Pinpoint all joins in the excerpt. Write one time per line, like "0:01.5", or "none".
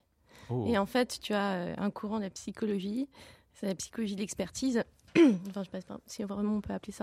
none